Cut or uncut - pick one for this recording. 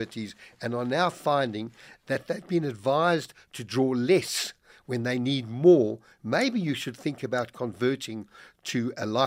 uncut